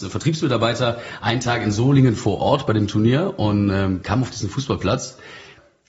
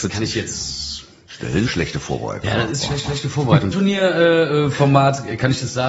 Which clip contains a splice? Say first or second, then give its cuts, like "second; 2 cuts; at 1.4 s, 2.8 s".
second; 3 cuts; at 1.7 s, 3.0 s, 3.7 s